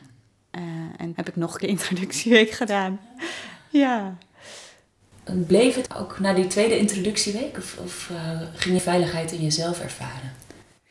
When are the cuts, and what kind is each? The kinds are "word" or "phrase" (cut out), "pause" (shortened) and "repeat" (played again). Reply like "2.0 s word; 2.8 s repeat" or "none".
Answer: 1.1 s word; 1.6 s word; 5.9 s word; 8.8 s word